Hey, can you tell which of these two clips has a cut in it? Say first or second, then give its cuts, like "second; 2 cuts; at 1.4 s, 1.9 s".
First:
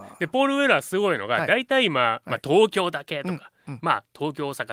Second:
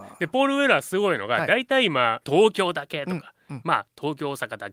second; 1 cut; at 2.2 s